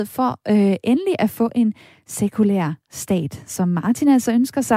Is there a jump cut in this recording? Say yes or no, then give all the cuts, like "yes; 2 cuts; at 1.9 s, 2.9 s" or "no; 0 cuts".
no; 0 cuts